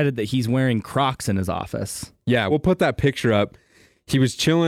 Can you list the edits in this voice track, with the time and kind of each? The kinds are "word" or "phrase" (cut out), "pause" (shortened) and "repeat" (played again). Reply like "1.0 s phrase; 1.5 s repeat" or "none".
2.5 s word